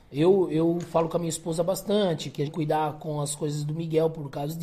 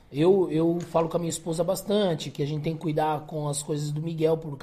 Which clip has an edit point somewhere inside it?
first; 1 cut; at 2.5 s

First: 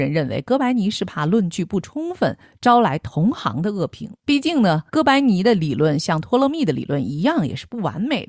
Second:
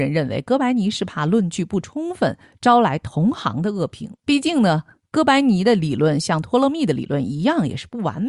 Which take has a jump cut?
first; 1 cut; at 4.9 s

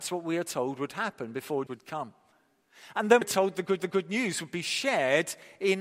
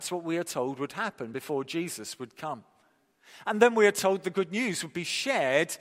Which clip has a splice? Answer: first; 3 cuts; at 1.7 s, 3.2 s, 3.8 s

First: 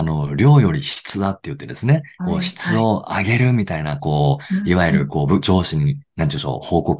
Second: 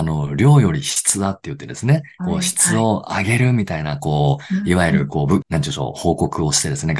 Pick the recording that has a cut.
second; 1 cut; at 5.4 s

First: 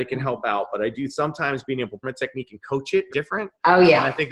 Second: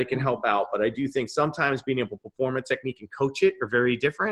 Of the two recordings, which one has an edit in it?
first; 3 cuts; at 1.1 s, 2.0 s, 3.1 s

